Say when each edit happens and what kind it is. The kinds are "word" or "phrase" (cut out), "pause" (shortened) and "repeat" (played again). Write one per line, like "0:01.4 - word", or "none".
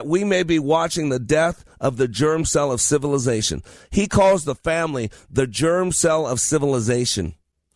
none